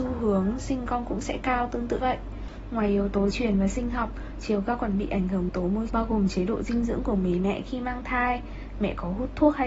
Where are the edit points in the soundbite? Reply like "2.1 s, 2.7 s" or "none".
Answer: 2.0 s, 3.3 s, 5.5 s, 5.9 s